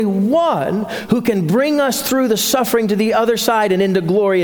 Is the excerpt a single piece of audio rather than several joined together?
yes; 0 cuts

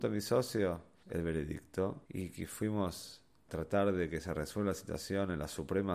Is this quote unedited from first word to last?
no; 3 cuts; at 1.0 s, 2.1 s, 3.5 s

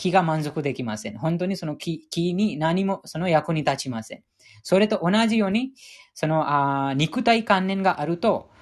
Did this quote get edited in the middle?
no; 0 cuts

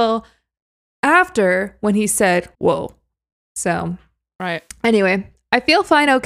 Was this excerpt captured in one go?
no; 1 cut; at 2.5 s

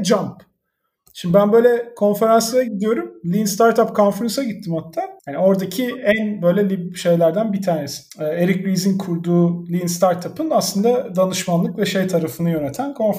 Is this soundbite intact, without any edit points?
no; 2 cuts; at 5.2 s, 8.1 s

